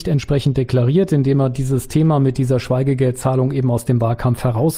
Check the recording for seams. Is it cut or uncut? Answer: uncut